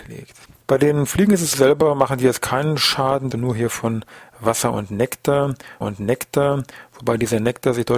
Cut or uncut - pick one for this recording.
cut